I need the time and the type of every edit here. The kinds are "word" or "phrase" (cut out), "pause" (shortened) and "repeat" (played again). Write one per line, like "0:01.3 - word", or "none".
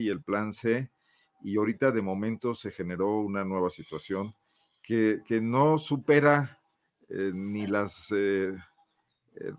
none